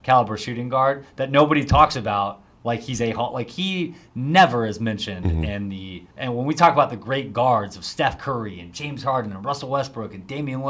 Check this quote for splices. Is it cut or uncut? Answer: cut